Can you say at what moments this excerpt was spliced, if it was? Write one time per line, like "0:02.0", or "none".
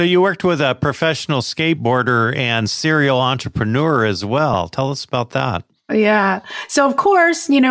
none